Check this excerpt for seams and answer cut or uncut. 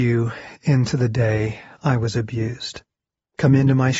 uncut